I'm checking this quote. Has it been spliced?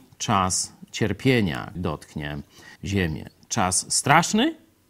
yes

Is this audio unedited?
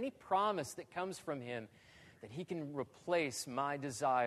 yes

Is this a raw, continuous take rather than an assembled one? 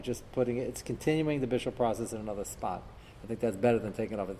yes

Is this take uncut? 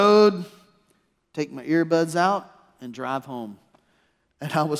yes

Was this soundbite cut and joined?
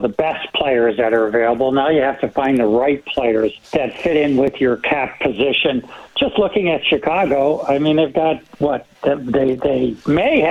yes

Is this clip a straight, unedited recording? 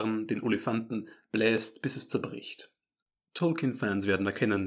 yes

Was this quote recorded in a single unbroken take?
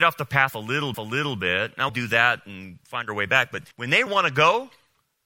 no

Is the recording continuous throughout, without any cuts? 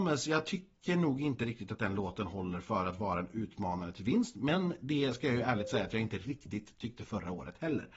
yes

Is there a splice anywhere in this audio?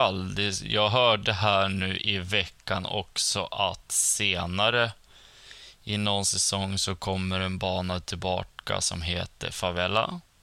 no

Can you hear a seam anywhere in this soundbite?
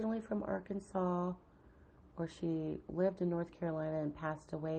no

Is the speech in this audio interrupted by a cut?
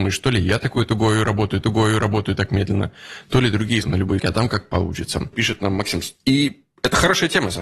yes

